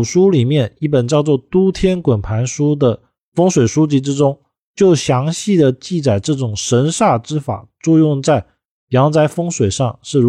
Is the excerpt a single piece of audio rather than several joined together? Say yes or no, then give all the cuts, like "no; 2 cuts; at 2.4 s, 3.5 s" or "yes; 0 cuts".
yes; 0 cuts